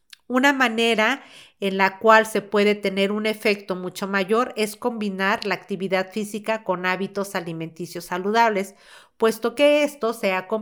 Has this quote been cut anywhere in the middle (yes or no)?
no